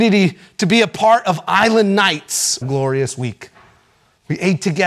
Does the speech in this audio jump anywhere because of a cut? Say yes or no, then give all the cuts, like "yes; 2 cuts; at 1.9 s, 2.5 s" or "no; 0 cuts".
yes; 1 cut; at 2.6 s